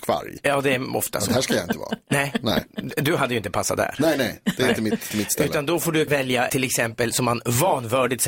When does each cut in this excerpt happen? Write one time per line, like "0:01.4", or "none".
0:05.1
0:06.1
0:06.5
0:07.1